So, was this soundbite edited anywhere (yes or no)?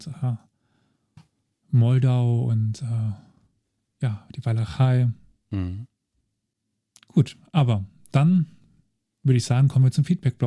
no